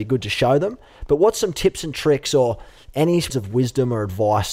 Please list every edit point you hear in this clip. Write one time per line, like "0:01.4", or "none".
0:03.3